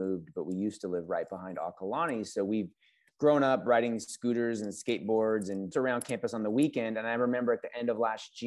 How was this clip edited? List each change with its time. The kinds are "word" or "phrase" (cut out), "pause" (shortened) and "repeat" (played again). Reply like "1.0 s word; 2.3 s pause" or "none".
5.7 s phrase